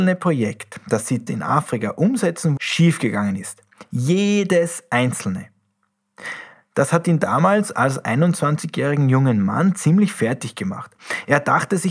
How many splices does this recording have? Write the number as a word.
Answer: two